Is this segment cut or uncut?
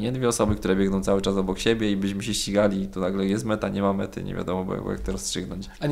uncut